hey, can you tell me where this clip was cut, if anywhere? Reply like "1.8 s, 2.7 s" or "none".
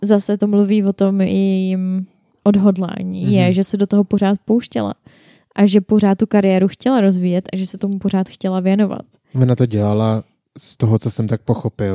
none

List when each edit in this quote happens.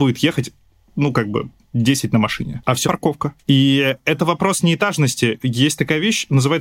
1.6 s, 2.8 s, 3.4 s

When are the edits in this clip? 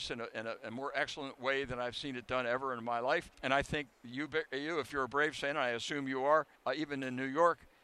3.3 s, 6.6 s

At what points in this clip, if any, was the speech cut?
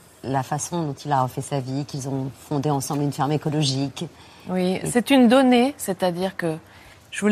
none

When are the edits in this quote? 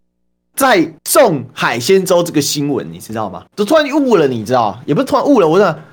1.0 s, 3.5 s

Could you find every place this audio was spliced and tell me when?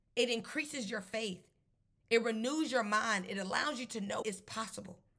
4.2 s

